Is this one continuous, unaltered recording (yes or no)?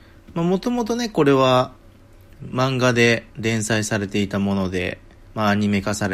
no